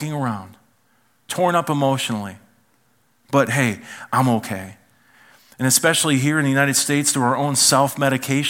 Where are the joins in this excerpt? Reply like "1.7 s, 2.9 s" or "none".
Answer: none